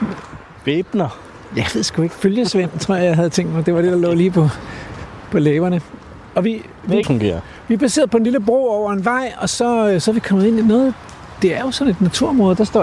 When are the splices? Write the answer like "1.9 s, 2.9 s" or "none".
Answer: 7.0 s